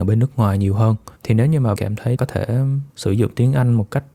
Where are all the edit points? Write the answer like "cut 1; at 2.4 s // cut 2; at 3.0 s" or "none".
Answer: cut 1; at 1.2 s // cut 2; at 1.8 s // cut 3; at 2.2 s // cut 4; at 2.9 s